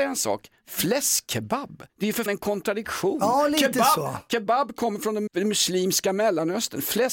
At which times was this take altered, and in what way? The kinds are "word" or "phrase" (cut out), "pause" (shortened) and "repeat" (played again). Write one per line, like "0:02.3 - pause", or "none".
0:01.9 - pause
0:02.3 - word
0:05.3 - word